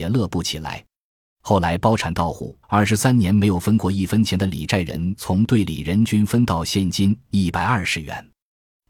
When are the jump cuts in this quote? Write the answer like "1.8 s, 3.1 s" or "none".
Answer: 2.6 s